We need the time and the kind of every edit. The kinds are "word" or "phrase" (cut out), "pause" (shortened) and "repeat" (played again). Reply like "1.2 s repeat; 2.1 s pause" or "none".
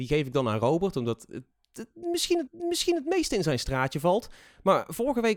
2.5 s repeat